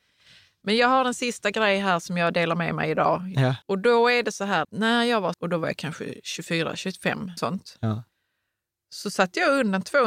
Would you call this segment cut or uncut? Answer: cut